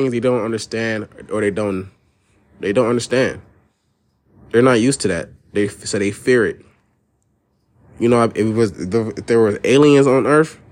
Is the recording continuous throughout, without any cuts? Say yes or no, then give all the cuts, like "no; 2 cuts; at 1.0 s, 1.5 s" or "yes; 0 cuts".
yes; 0 cuts